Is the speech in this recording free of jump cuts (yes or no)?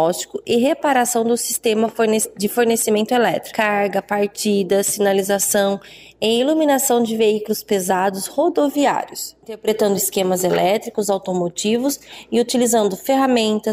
yes